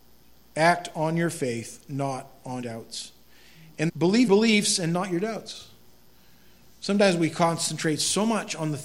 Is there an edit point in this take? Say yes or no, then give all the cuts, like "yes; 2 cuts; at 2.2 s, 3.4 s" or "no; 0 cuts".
yes; 3 cuts; at 2.6 s, 3.9 s, 4.3 s